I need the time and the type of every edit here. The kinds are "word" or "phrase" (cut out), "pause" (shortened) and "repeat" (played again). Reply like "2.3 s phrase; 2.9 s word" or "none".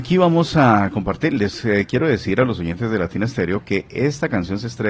none

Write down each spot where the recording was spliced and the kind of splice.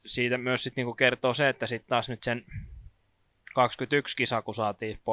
2.2 s word

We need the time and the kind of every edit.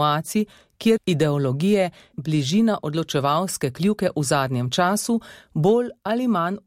1.0 s phrase; 2.1 s word

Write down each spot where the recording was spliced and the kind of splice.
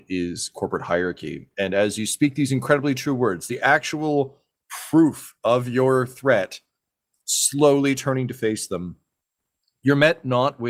none

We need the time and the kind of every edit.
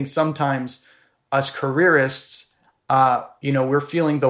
none

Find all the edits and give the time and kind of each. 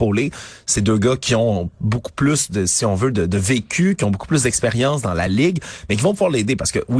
none

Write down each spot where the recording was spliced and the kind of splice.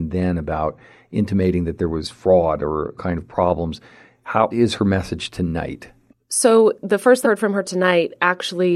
3.0 s word; 4.5 s word; 6.1 s pause; 7.2 s word

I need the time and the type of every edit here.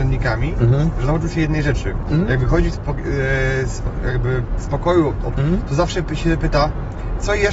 5.3 s word

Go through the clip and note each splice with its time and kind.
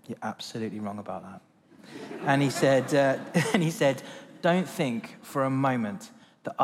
none

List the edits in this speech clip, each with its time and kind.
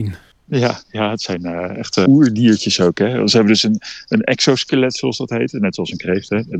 2.1 s word

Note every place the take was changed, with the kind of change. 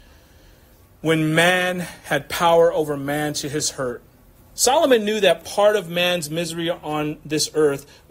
none

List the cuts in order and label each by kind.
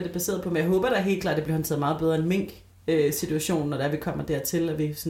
none

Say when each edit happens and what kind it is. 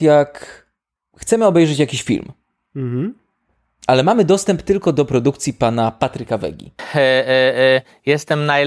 none

